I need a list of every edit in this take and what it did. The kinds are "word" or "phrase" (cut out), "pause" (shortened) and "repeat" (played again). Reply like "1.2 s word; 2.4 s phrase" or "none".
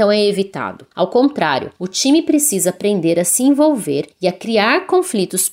0.9 s pause; 1.8 s pause; 4.1 s pause